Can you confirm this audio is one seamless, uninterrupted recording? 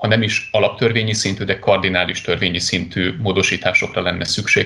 yes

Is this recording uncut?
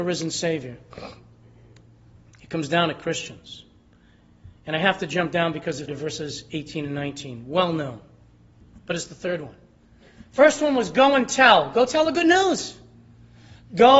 no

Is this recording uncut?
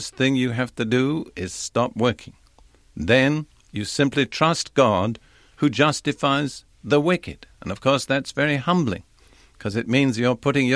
yes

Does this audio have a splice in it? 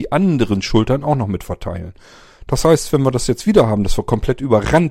no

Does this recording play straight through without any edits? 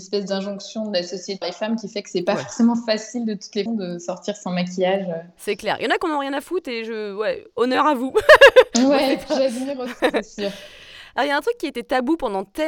no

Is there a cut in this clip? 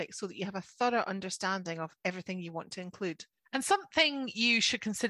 no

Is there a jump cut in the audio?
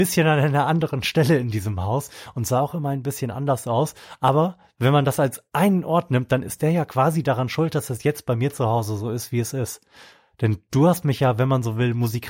no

